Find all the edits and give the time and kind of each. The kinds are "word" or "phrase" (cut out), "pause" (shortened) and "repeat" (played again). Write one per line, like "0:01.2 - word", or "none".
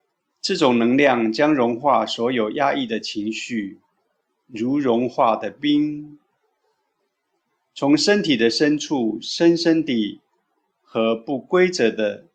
0:04.2 - pause
0:07.0 - pause

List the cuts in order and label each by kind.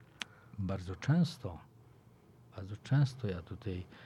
none

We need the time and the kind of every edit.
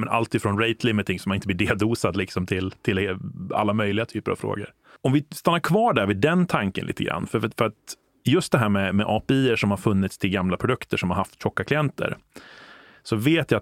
none

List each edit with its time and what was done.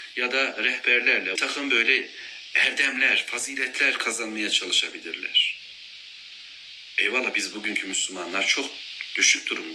0:01.4 - phrase

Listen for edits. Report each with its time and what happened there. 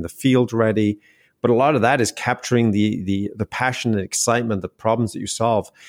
none

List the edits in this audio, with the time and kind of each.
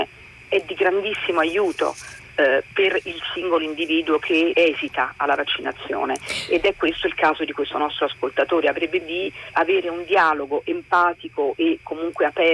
0:04.5 - word
0:09.0 - word
0:09.5 - word

